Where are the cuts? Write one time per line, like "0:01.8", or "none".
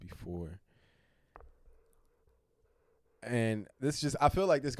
0:03.7